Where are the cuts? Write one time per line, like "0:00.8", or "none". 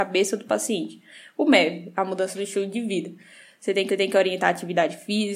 0:03.9